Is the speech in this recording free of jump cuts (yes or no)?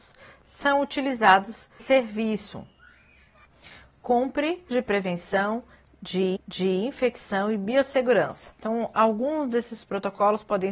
no